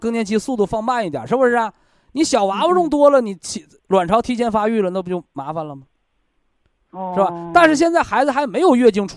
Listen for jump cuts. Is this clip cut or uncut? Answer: uncut